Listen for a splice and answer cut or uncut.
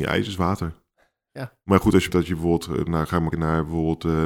cut